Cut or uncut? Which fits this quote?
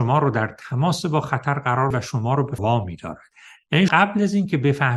cut